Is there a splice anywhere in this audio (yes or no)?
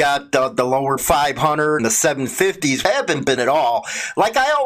yes